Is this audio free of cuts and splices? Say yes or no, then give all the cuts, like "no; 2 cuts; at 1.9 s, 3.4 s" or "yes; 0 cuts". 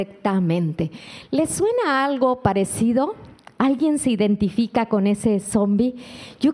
yes; 0 cuts